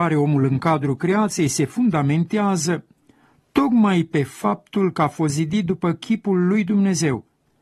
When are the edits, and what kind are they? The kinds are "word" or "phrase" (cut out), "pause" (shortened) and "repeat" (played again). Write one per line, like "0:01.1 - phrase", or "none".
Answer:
none